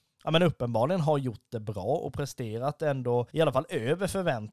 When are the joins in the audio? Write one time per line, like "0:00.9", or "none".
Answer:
0:03.3